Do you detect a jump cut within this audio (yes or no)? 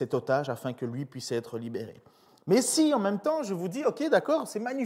no